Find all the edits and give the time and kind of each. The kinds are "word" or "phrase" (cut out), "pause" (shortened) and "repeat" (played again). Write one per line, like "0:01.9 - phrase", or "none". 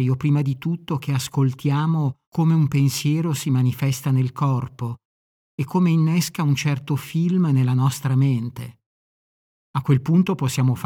0:02.2 - pause

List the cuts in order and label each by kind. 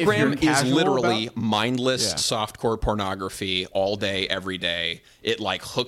none

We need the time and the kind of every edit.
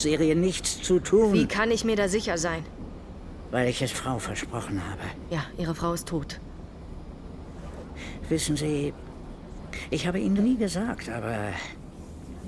0:03.9 - word
0:10.4 - word

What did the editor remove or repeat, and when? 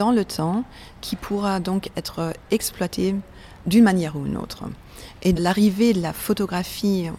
0:03.6 - pause
0:05.4 - phrase

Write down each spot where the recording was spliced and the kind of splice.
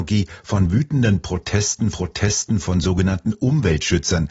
0:01.9 - repeat

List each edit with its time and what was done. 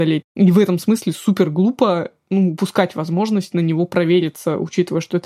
none

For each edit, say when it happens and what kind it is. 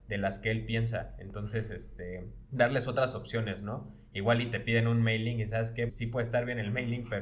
0:02.4 - pause
0:05.9 - word

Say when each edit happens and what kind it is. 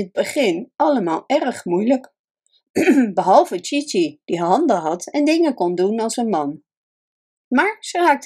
none

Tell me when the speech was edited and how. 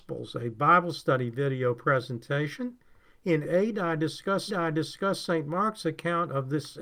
0:03.4 - word
0:04.5 - repeat

